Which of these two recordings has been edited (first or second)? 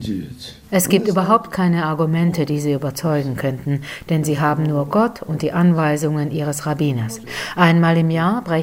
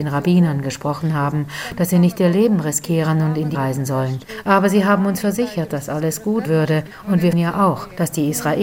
second